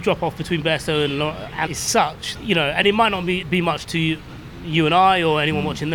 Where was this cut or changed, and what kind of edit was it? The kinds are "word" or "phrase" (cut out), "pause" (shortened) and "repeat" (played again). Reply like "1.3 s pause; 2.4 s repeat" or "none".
1.7 s word; 2.4 s word; 2.8 s word; 3.4 s word; 3.8 s word